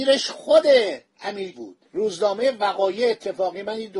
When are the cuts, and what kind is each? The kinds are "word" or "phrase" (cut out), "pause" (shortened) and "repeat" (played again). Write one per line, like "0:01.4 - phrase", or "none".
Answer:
0:01.5 - word
0:01.9 - pause